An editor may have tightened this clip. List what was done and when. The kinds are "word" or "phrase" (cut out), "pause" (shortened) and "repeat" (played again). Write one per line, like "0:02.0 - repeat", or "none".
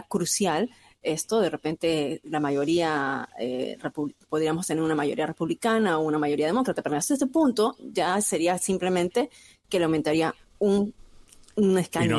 none